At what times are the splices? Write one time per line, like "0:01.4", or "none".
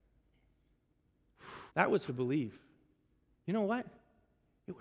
0:01.7
0:02.1